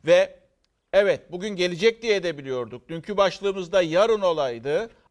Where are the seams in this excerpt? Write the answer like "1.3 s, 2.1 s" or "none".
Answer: none